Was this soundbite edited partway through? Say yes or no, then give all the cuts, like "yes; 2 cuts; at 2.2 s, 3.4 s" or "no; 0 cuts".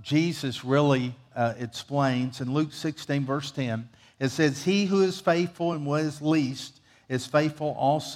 no; 0 cuts